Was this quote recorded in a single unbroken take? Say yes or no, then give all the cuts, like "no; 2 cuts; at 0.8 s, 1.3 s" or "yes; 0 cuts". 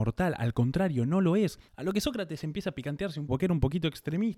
no; 2 cuts; at 1.7 s, 3.3 s